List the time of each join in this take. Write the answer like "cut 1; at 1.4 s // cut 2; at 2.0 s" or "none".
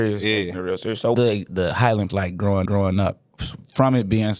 cut 1; at 1.1 s // cut 2; at 1.5 s // cut 3; at 2.1 s // cut 4; at 2.7 s